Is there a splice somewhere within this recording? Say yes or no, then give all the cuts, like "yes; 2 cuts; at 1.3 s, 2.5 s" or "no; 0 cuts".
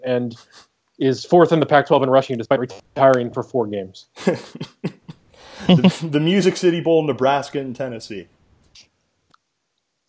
no; 0 cuts